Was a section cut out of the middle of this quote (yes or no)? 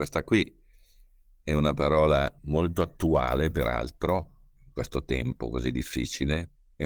yes